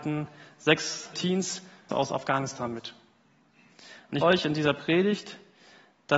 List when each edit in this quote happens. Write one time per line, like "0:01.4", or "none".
0:01.1
0:01.9
0:04.2